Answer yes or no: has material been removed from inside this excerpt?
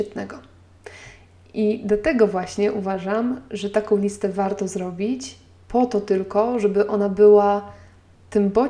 no